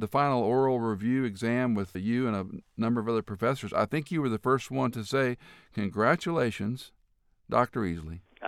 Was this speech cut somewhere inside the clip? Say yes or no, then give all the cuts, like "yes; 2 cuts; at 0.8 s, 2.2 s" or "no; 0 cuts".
yes; 1 cut; at 1.9 s